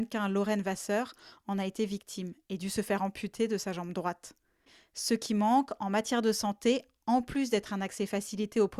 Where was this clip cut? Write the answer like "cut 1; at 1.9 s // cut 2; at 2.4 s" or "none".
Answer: none